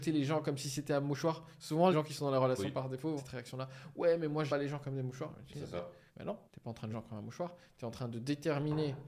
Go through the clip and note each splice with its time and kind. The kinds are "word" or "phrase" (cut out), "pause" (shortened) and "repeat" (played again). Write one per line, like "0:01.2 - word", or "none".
0:01.9 - word
0:03.2 - word
0:04.5 - word
0:06.1 - pause
0:06.5 - pause
0:06.9 - phrase